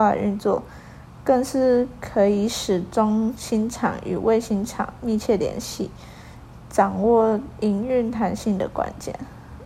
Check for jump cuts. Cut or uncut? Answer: uncut